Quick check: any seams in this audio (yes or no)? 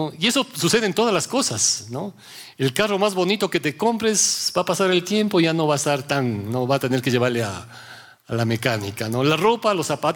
no